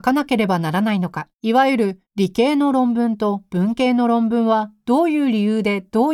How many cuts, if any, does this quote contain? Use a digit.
2